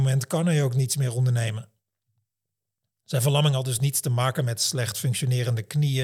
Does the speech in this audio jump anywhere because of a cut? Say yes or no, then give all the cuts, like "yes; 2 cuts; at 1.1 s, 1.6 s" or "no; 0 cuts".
no; 0 cuts